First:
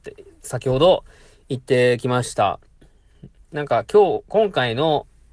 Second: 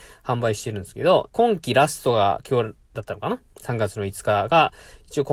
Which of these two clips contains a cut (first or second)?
second